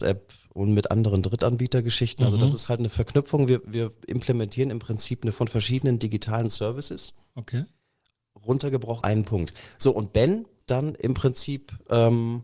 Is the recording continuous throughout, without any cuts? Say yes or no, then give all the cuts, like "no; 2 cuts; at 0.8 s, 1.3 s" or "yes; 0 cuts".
no; 3 cuts; at 5.3 s, 9.0 s, 10.6 s